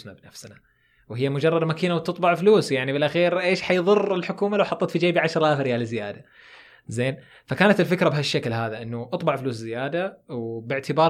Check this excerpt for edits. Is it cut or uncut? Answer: uncut